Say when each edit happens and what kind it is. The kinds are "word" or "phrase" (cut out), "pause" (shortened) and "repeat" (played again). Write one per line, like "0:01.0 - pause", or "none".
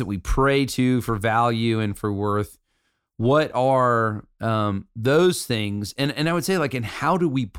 none